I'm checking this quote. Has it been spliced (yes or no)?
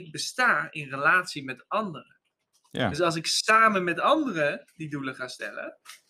no